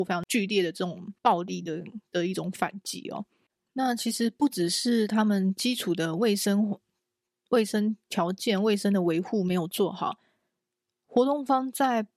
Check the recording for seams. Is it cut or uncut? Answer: cut